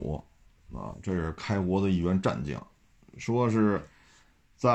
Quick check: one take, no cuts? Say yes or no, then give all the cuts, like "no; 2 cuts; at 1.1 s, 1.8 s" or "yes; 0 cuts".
yes; 0 cuts